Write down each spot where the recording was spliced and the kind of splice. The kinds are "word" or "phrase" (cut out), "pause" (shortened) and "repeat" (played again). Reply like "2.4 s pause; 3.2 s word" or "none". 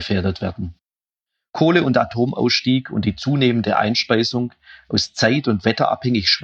none